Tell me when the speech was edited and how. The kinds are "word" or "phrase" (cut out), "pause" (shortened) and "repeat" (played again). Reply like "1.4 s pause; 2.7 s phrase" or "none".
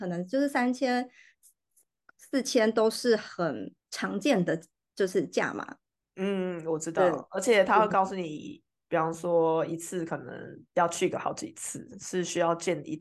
3.8 s pause; 10.7 s pause